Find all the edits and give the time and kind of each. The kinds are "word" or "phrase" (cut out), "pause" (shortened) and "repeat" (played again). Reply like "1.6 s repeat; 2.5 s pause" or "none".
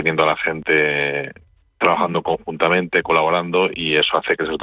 none

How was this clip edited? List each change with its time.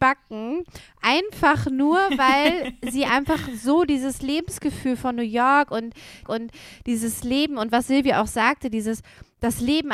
6.2 s repeat

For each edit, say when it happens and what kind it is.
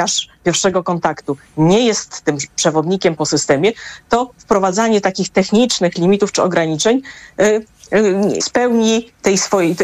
3.2 s word; 8.4 s word

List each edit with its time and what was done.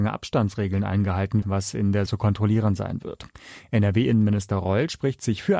1.4 s word; 2.1 s phrase

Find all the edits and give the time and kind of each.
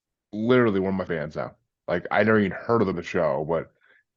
1.1 s word; 2.9 s word

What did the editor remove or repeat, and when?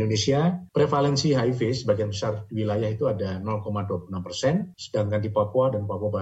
none

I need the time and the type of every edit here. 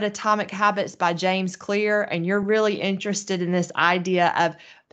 none

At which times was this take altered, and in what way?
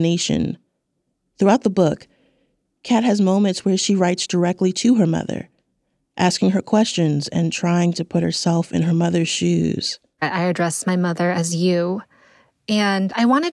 none

